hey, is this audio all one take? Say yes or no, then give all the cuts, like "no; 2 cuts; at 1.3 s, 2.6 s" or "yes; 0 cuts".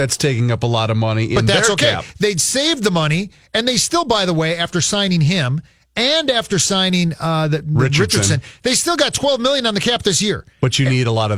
yes; 0 cuts